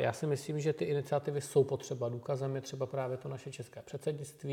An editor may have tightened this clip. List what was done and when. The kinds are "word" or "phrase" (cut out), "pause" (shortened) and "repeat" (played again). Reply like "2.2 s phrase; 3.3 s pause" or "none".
none